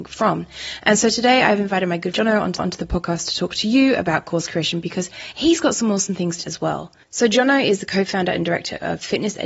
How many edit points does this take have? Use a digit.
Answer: 3